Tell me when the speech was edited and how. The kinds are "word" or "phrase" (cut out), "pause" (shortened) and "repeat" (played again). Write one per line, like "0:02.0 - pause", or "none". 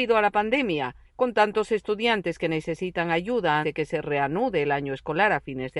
0:03.6 - word